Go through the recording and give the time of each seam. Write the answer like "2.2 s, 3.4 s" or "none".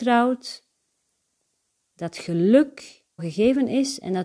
3.2 s